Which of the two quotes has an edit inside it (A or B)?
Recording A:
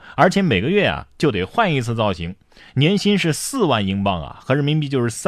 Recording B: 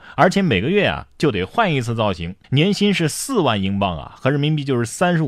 B